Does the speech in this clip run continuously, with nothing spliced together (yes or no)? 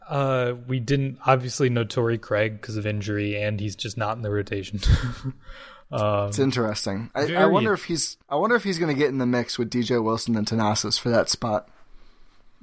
no